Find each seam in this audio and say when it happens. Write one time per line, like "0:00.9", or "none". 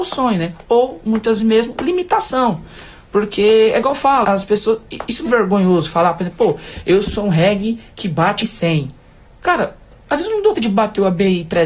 0:01.4
0:04.2
0:05.2
0:08.4
0:10.5